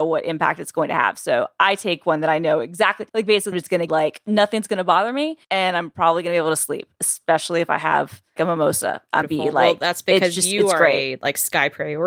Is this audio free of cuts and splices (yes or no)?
no